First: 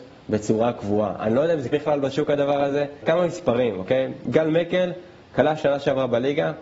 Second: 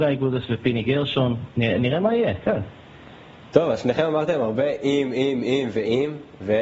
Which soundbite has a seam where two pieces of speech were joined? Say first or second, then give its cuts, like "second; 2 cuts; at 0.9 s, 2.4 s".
first; 2 cuts; at 1.7 s, 3.0 s